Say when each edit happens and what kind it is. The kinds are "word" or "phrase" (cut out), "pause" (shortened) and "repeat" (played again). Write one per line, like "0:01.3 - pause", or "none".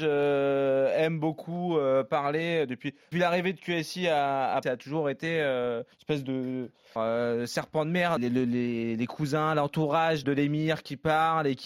0:03.1 - word
0:04.6 - word
0:05.9 - pause
0:07.0 - phrase
0:08.2 - phrase
0:10.2 - word